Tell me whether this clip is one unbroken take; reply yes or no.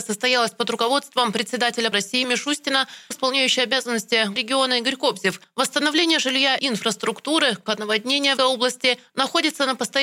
no